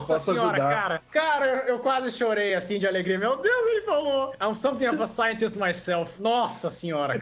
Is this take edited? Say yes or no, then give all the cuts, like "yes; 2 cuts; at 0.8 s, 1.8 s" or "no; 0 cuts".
no; 0 cuts